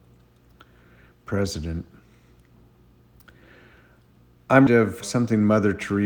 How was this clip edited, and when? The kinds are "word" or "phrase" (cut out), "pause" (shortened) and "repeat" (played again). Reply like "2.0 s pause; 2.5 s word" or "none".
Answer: 4.7 s word; 5.0 s word